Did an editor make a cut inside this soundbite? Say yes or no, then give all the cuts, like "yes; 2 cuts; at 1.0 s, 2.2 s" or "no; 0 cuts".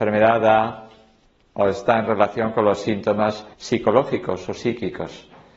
yes; 1 cut; at 3.5 s